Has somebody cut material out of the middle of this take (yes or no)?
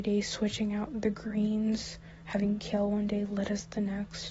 no